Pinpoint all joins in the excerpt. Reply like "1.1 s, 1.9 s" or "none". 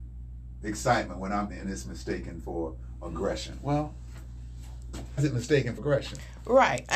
1.5 s, 5.2 s, 5.8 s